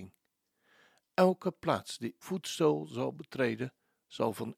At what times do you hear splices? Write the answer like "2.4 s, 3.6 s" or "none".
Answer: 2.2 s